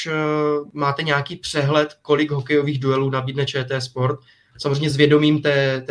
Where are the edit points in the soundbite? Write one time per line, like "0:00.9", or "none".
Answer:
none